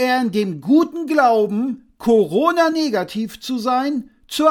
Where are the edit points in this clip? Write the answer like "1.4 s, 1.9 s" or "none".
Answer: none